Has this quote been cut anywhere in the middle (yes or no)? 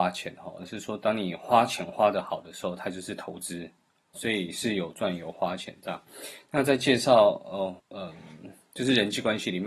yes